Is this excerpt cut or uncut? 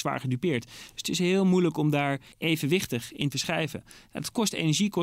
cut